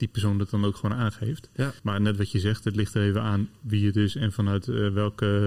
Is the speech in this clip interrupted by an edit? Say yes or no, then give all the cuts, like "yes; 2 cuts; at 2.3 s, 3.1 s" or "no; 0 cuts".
yes; 1 cut; at 1.8 s